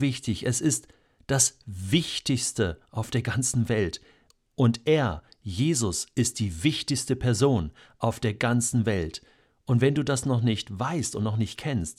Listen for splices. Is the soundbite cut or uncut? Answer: uncut